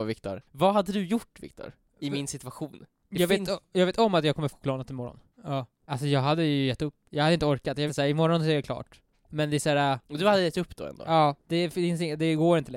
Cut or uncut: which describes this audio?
cut